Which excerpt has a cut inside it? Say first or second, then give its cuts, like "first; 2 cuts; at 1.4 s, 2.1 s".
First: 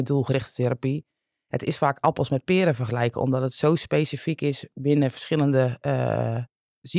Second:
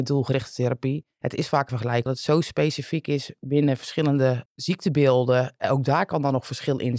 second; 4 cuts; at 1.1 s, 1.7 s, 2.1 s, 4.5 s